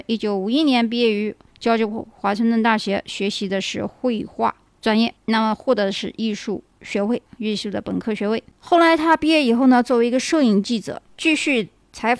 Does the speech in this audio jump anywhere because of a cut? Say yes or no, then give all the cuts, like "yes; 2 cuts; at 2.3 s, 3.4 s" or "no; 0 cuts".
yes; 1 cut; at 5.2 s